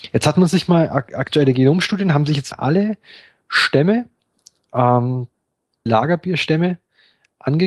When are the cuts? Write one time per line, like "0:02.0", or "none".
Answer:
0:02.5
0:05.9

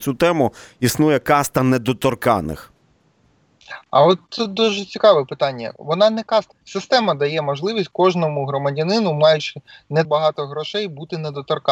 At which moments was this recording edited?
0:06.5
0:10.0

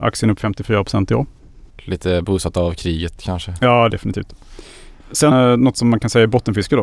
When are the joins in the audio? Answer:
0:01.7
0:03.9
0:05.3

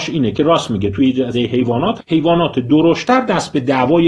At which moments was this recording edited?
0:01.3
0:02.0

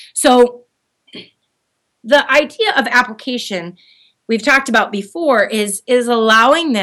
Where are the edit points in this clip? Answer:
none

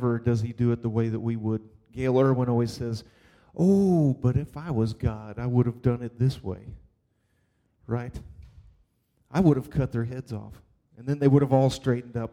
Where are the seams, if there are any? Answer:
none

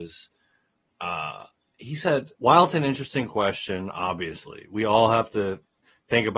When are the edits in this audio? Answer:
0:02.3

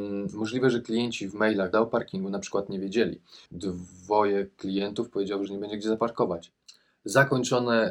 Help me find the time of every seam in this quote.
0:01.7
0:03.5
0:05.5

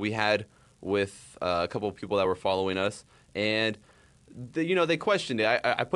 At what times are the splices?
none

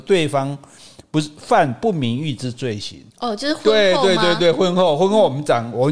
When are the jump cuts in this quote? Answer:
0:03.1

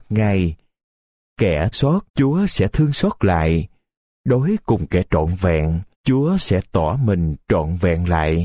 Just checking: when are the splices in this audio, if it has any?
0:01.7
0:02.1
0:05.9

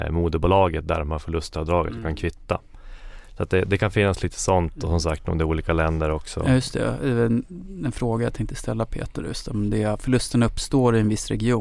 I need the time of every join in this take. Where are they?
none

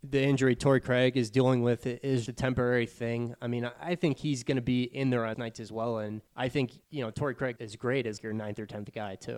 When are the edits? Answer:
0:02.3
0:05.3
0:06.3
0:06.8
0:07.6
0:08.2

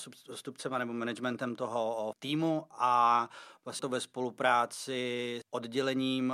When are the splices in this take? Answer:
0:02.1
0:03.8
0:05.4

